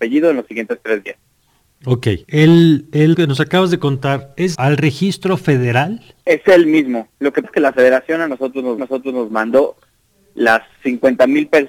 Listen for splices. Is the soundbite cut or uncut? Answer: cut